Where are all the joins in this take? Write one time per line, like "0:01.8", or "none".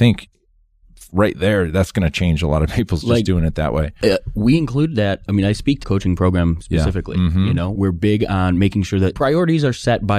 0:03.0
0:05.8